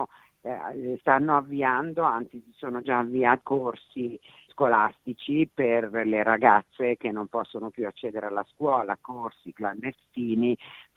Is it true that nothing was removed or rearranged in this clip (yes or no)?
no